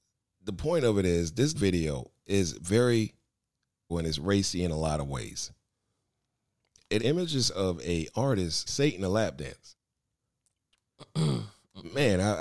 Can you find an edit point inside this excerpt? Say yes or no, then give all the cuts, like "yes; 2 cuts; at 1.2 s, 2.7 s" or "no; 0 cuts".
yes; 4 cuts; at 1.5 s, 3.9 s, 7.0 s, 8.7 s